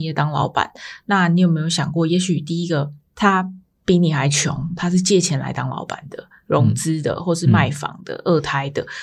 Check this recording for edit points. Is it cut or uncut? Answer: uncut